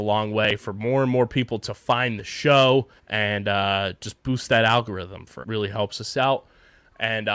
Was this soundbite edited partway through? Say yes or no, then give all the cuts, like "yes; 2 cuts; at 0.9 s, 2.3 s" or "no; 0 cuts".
yes; 2 cuts; at 3.0 s, 5.4 s